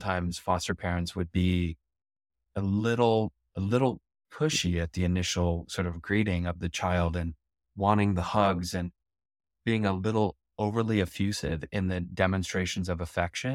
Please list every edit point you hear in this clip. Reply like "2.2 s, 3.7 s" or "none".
none